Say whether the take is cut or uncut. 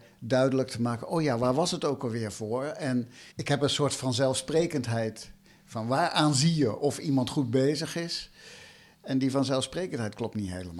cut